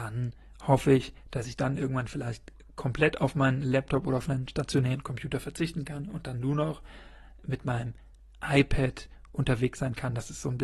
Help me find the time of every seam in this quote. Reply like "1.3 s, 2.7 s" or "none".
none